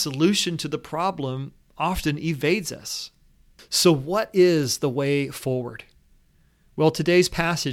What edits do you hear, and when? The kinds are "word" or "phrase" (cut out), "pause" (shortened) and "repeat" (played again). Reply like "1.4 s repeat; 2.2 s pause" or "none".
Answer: none